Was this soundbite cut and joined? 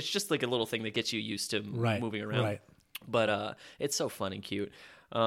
no; 0 cuts

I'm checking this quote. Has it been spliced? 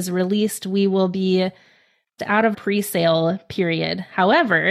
yes; 2 cuts; at 2.2 s, 2.5 s

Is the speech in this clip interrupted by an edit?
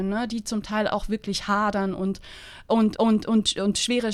yes; 1 cut; at 3.0 s

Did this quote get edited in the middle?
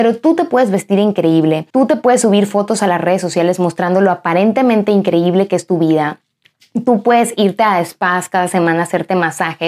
yes; 1 cut; at 1.7 s

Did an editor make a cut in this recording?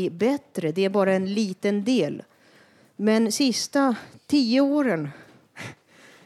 no; 0 cuts

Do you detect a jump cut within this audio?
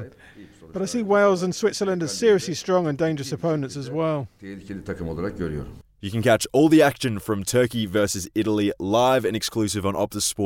no; 0 cuts

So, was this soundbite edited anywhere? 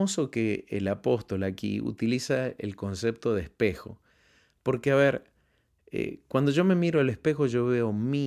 no; 0 cuts

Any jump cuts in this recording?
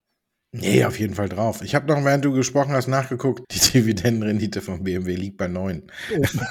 yes; 1 cut; at 3.4 s

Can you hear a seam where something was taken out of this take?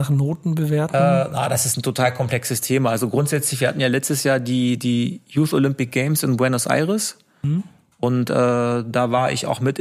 no; 0 cuts

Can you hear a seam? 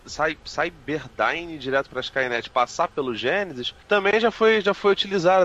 yes; 1 cut; at 1.9 s

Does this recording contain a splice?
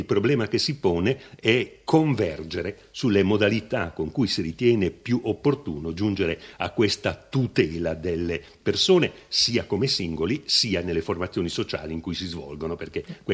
no; 0 cuts

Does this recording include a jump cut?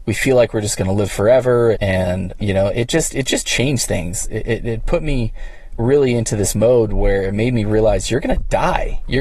yes; 2 cuts; at 1.7 s, 2.4 s

